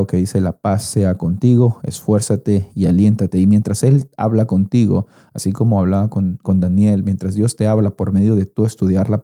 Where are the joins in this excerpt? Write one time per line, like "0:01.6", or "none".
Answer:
none

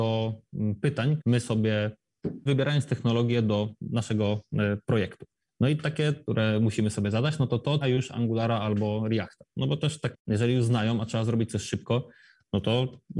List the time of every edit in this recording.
0:01.2
0:02.5
0:05.4
0:06.2
0:07.8
0:10.1

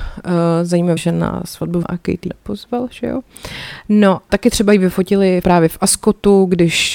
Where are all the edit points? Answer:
0:01.0
0:01.8
0:02.3
0:04.3
0:05.4

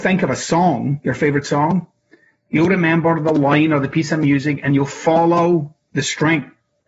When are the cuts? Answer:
none

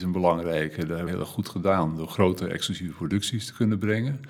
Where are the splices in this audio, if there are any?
0:01.1

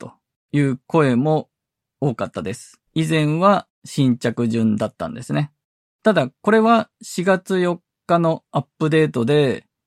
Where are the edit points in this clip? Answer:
0:02.9
0:06.9

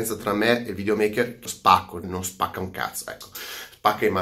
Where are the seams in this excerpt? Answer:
0:01.5
0:02.0

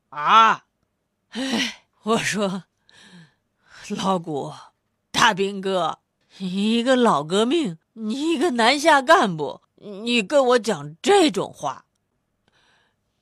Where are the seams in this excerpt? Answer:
0:01.9
0:06.2
0:07.8
0:09.6

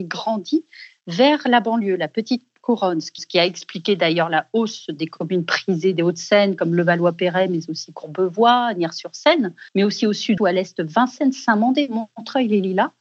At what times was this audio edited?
0:03.2
0:09.7
0:10.4

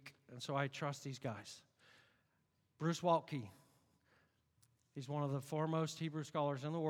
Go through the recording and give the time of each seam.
none

